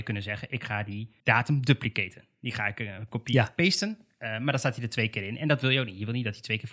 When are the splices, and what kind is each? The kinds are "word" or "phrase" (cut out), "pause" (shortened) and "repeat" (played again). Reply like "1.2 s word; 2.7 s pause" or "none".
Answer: 1.2 s pause